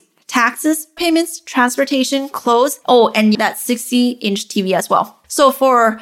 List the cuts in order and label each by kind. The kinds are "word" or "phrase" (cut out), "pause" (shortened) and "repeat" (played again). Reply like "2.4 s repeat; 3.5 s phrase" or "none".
1.0 s phrase; 3.3 s word